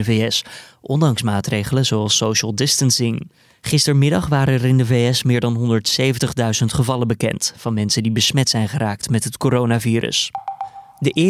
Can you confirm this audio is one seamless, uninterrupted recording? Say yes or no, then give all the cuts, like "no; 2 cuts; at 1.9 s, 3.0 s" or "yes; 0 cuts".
yes; 0 cuts